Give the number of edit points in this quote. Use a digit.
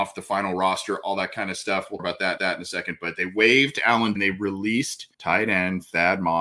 4